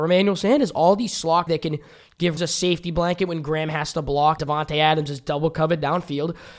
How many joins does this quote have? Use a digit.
3